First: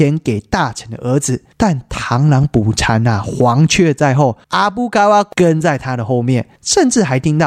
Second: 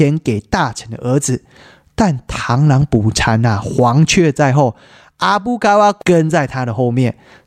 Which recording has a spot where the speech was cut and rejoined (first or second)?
first